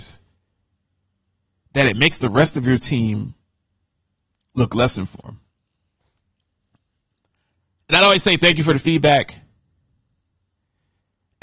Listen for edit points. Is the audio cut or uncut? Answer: uncut